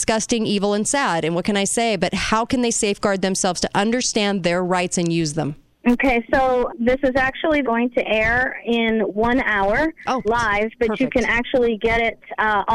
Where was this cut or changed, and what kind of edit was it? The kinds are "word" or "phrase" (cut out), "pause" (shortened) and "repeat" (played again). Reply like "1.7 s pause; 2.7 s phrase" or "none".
5.7 s pause; 6.7 s word; 7.6 s phrase; 10.2 s word